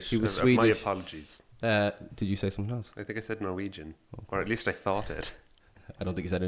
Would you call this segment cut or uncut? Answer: uncut